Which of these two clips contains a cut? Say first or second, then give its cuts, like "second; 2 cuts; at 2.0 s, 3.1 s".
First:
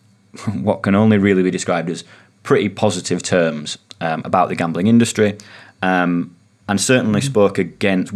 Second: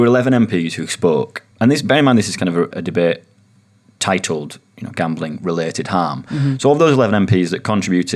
second; 2 cuts; at 1.5 s, 2.7 s